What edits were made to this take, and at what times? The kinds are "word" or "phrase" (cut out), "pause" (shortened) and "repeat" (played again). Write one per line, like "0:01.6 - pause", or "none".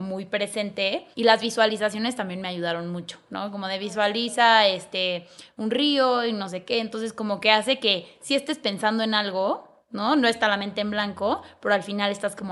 0:01.1 - pause